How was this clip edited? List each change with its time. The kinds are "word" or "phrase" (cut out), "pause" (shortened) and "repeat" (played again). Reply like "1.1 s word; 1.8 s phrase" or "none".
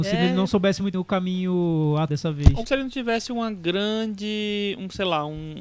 0.9 s word; 2.1 s word; 2.7 s word